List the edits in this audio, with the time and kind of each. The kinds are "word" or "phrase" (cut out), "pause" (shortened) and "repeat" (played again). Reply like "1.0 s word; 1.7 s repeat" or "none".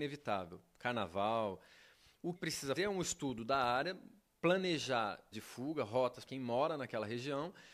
2.4 s word; 2.8 s word; 5.3 s word; 6.3 s word